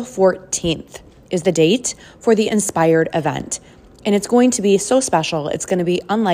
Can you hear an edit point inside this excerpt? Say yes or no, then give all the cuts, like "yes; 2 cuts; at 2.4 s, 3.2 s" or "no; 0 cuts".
no; 0 cuts